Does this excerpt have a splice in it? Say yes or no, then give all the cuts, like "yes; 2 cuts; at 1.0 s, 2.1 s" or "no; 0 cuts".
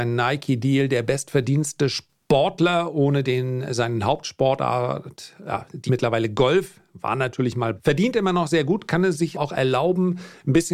yes; 3 cuts; at 5.9 s, 7.8 s, 9.3 s